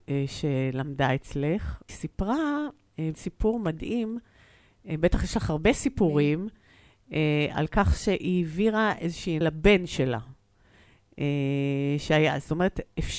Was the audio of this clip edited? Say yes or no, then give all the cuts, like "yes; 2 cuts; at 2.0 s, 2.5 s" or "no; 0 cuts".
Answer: yes; 3 cuts; at 1.9 s, 3.1 s, 9.4 s